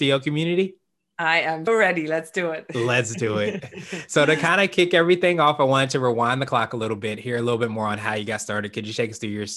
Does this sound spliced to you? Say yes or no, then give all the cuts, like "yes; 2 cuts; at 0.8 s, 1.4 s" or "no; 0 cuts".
yes; 1 cut; at 1.7 s